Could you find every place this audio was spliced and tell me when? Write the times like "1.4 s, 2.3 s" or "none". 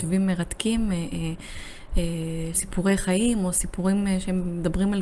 2.5 s